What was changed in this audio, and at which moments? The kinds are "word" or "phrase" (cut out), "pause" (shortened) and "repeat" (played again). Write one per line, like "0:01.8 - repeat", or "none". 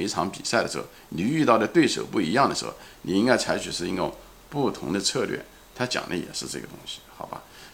none

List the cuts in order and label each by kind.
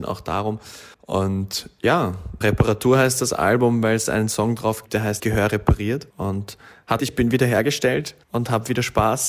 0:00.9 - pause
0:02.4 - word
0:04.9 - word
0:05.2 - word
0:06.1 - pause
0:07.0 - word
0:08.2 - pause

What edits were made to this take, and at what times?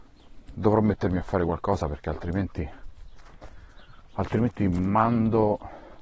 none

